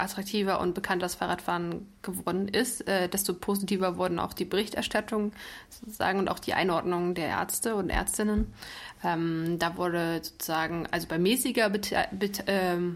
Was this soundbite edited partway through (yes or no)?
no